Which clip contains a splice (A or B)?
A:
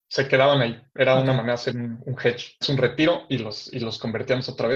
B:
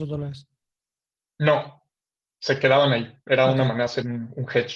A